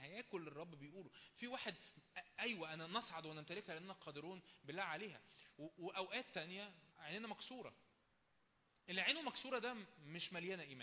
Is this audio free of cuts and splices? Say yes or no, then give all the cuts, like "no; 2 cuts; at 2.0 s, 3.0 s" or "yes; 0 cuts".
no; 1 cut; at 6.9 s